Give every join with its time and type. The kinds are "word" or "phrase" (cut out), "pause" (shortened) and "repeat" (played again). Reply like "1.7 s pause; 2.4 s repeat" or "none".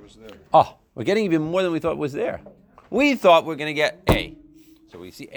none